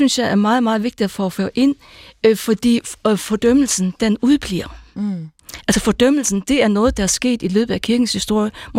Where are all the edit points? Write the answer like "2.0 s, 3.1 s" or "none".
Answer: none